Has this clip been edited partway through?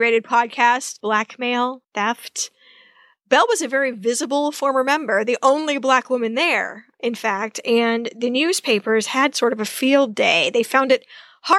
yes; 1 cut; at 1.8 s

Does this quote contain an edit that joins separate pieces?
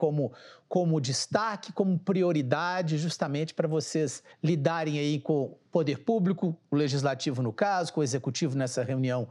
yes; 1 cut; at 4.3 s

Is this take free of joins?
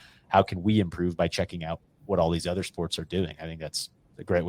yes; 0 cuts

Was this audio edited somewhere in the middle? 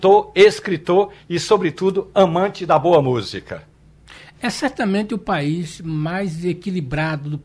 no; 0 cuts

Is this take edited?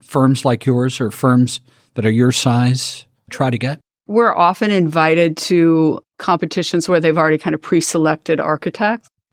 no; 0 cuts

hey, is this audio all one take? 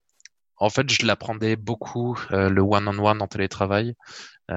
yes; 0 cuts

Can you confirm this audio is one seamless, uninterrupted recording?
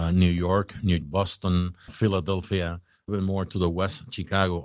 no; 3 cuts; at 1.0 s, 1.9 s, 3.1 s

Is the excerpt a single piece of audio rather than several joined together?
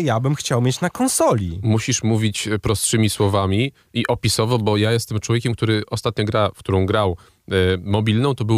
yes; 0 cuts

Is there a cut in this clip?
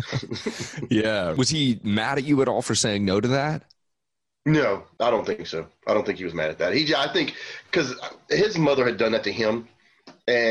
no; 0 cuts

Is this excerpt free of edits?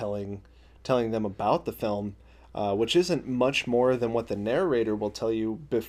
yes; 0 cuts

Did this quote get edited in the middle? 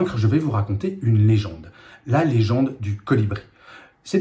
no; 0 cuts

